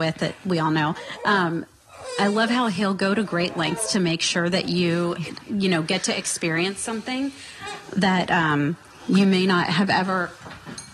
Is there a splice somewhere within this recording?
no; 0 cuts

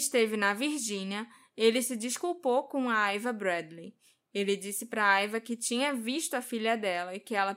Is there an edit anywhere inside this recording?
no; 0 cuts

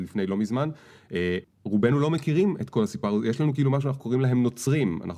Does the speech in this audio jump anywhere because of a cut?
yes; 1 cut; at 1.4 s

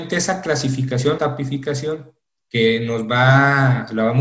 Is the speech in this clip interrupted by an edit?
yes; 1 cut; at 1.2 s

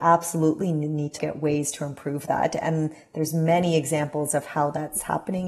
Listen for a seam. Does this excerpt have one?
yes; 1 cut; at 1.2 s

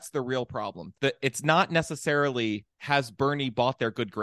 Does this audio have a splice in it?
yes; 2 cuts; at 1.0 s, 2.7 s

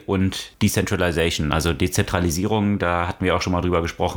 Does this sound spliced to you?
no; 0 cuts

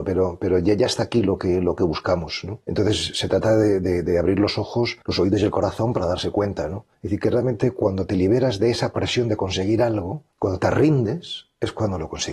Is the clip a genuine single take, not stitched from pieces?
no; 4 cuts; at 2.6 s, 5.0 s, 6.9 s, 10.3 s

